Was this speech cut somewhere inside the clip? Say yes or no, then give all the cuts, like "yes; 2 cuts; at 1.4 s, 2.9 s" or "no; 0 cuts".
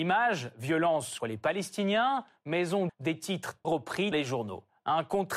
yes; 4 cuts; at 1.2 s, 2.9 s, 3.6 s, 4.1 s